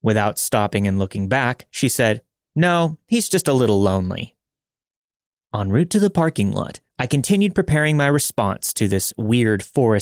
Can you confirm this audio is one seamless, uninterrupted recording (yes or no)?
yes